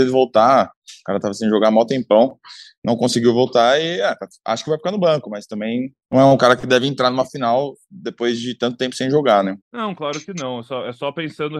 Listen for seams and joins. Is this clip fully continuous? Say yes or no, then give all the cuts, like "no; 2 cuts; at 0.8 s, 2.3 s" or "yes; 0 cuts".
no; 2 cuts; at 6.0 s, 9.6 s